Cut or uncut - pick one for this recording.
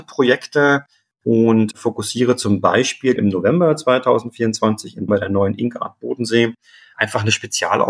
cut